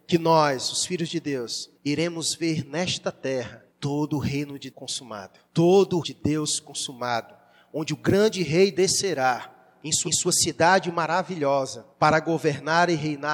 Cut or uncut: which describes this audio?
cut